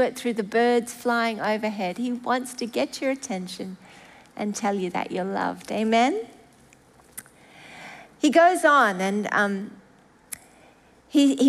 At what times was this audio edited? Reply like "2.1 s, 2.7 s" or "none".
none